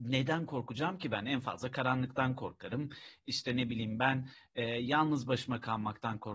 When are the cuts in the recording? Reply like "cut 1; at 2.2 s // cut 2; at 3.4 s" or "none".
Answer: none